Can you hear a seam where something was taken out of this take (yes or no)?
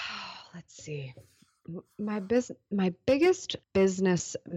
yes